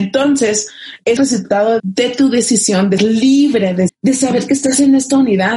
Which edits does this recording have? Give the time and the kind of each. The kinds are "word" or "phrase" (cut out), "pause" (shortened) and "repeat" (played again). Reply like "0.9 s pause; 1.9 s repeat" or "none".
1.2 s word; 1.8 s word; 3.0 s word; 3.9 s word